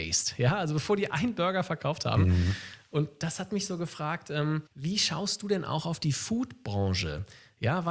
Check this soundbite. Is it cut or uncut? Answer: cut